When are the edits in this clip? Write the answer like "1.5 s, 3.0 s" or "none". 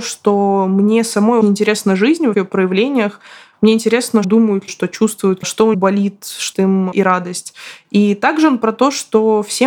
1.4 s, 2.3 s, 4.2 s, 4.7 s, 5.4 s, 5.7 s, 6.5 s, 6.9 s